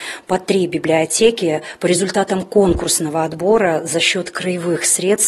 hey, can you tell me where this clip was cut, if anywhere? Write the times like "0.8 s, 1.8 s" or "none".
none